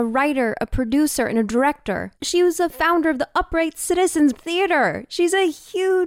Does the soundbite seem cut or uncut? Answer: cut